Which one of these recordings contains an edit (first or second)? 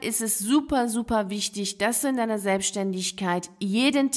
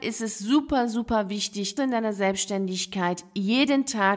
second